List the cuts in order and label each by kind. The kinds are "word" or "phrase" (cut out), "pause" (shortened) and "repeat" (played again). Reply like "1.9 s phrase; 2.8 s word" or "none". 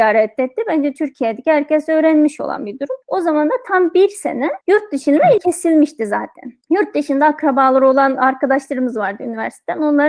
3.0 s pause; 4.6 s pause; 5.4 s word; 6.6 s pause